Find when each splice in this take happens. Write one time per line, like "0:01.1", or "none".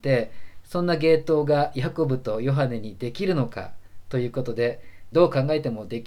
0:05.1